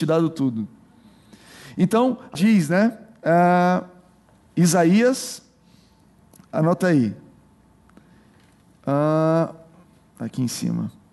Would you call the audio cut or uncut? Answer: cut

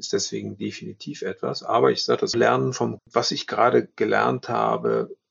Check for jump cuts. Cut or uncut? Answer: cut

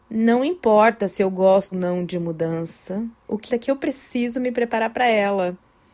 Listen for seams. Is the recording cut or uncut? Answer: cut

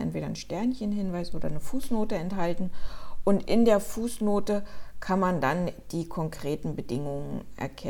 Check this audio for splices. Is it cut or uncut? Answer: uncut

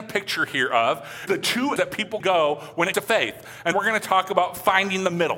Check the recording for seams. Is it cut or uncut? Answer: cut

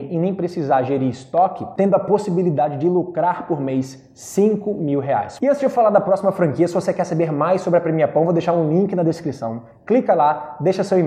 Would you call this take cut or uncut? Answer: uncut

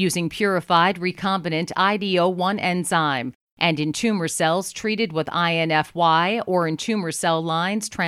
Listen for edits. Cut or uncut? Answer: uncut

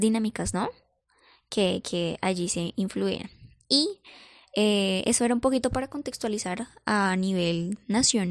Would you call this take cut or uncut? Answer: uncut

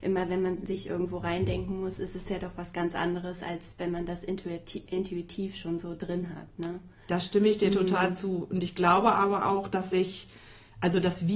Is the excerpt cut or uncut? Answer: uncut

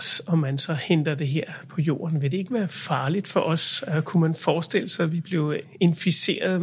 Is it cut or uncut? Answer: uncut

